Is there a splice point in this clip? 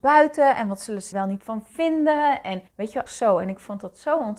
yes; 3 cuts; at 1.1 s, 2.7 s, 3.1 s

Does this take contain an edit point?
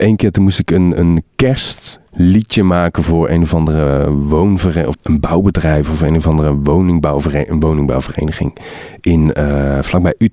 yes; 2 cuts; at 2.1 s, 4.9 s

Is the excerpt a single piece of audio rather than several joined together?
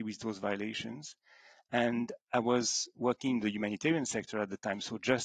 yes; 0 cuts

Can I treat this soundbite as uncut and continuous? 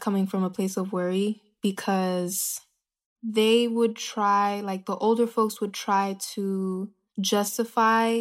yes; 0 cuts

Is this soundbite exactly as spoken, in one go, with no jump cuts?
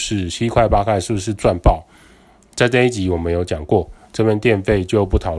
yes; 0 cuts

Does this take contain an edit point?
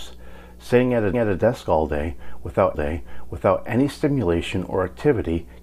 yes; 2 cuts; at 1.1 s, 2.7 s

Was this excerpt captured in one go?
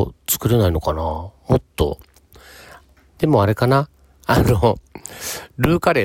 yes; 0 cuts

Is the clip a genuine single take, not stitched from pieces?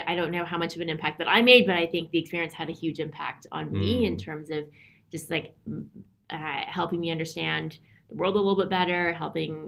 yes; 0 cuts

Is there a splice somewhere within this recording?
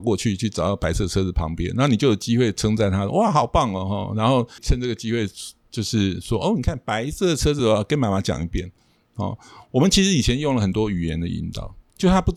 no; 0 cuts

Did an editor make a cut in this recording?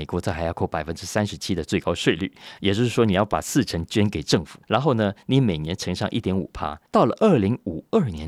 yes; 2 cuts; at 4.6 s, 6.9 s

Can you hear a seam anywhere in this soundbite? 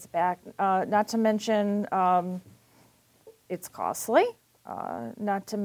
no; 0 cuts

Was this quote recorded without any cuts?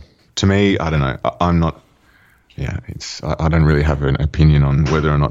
yes; 0 cuts

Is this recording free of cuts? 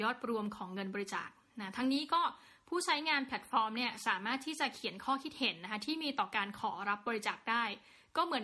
yes; 0 cuts

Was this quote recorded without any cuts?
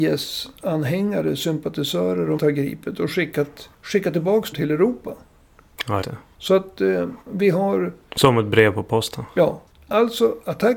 no; 6 cuts; at 2.4 s, 3.7 s, 4.5 s, 6.0 s, 7.2 s, 9.7 s

